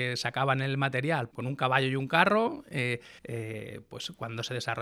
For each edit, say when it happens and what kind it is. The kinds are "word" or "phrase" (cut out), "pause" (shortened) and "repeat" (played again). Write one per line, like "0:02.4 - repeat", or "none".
0:01.3 - word
0:03.2 - pause